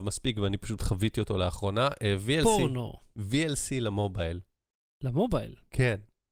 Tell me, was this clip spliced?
no; 0 cuts

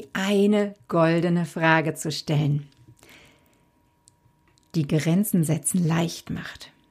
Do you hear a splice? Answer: no; 0 cuts

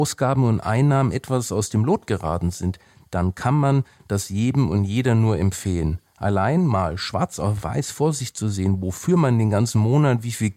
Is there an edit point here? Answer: no; 0 cuts

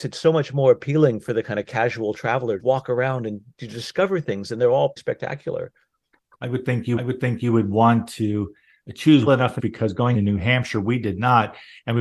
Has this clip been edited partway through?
yes; 6 cuts; at 2.6 s, 5.0 s, 7.0 s, 9.3 s, 9.6 s, 10.1 s

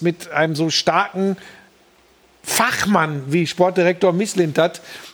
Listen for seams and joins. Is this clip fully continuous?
yes; 0 cuts

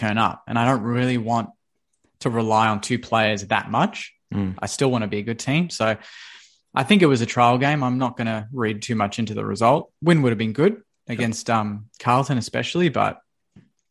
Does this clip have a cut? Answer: no; 0 cuts

